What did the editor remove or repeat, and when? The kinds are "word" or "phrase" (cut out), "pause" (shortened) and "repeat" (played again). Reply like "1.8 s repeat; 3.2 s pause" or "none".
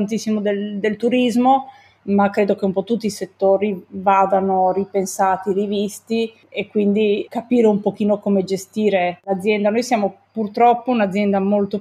none